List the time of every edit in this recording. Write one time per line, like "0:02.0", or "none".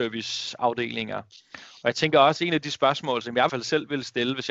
0:03.5